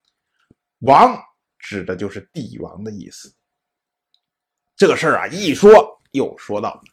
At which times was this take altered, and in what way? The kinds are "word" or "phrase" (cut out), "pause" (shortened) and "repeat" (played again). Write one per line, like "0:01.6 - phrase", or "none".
none